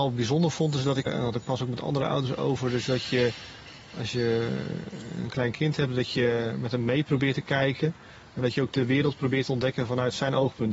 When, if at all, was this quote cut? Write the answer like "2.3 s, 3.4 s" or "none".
1.1 s